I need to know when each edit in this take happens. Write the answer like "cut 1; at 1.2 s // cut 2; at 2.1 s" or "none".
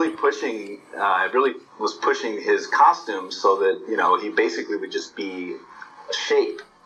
cut 1; at 1.7 s